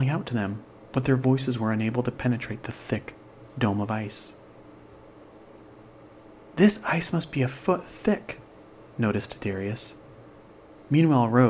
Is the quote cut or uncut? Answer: uncut